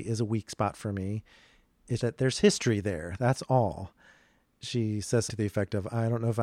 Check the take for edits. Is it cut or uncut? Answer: cut